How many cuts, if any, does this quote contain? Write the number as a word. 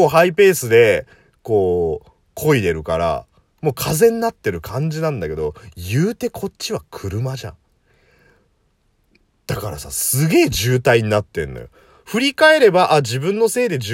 zero